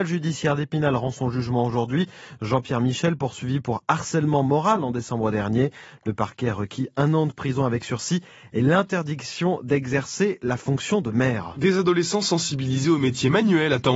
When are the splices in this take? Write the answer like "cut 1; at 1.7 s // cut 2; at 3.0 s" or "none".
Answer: none